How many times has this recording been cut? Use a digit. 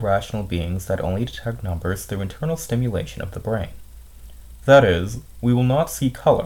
0